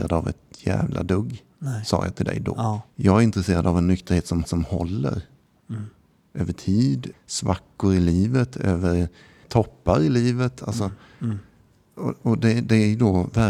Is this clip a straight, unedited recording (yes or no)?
no